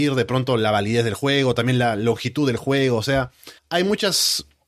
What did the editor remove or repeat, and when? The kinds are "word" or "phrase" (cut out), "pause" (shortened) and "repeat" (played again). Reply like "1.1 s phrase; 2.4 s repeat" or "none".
3.6 s pause